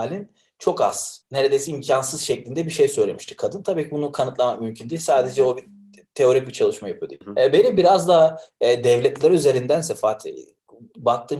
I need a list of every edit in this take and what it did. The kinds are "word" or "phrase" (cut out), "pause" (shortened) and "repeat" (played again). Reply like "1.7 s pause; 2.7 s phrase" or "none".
none